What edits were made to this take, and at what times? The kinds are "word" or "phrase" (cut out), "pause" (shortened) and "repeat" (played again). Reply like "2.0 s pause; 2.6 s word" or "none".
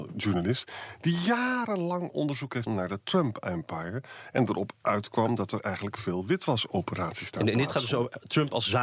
2.7 s word